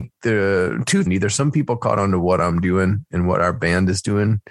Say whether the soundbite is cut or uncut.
cut